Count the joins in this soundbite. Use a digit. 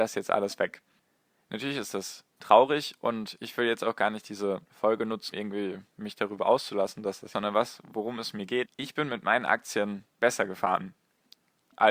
5